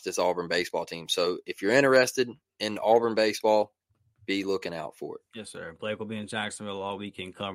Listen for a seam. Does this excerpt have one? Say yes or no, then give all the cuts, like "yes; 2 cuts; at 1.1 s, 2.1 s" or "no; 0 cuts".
no; 0 cuts